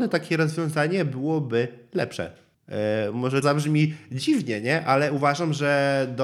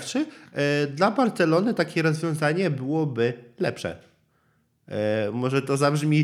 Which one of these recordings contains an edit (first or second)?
first